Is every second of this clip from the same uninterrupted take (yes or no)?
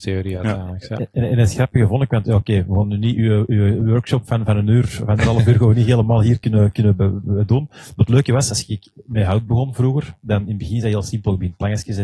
yes